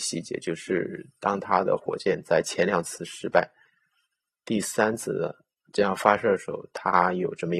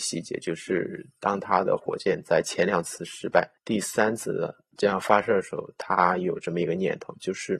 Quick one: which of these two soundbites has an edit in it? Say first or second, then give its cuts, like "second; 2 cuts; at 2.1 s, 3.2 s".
second; 2 cuts; at 3.6 s, 4.7 s